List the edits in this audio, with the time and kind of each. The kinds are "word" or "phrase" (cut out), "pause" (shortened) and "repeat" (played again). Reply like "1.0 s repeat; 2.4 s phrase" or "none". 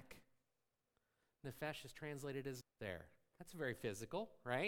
2.6 s word